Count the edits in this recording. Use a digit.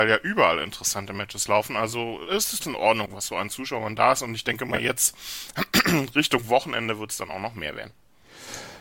2